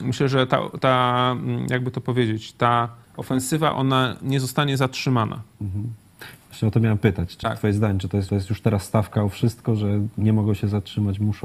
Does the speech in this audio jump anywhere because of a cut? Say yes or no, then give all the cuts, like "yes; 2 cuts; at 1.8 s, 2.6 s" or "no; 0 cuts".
yes; 3 cuts; at 3.0 s, 7.4 s, 8.3 s